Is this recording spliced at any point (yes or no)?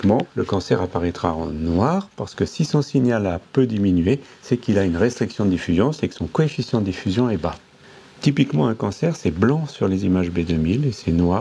no